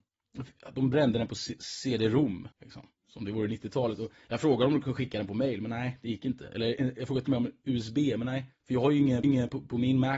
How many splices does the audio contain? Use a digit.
3